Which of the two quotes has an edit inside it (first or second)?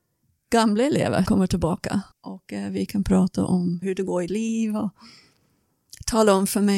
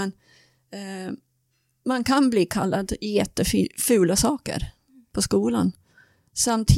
first